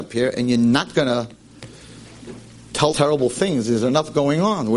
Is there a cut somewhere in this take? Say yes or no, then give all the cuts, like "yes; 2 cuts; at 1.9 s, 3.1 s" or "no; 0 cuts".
yes; 1 cut; at 2.9 s